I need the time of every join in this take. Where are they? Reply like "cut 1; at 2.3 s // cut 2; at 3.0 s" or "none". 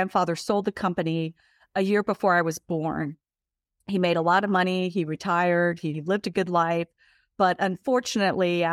none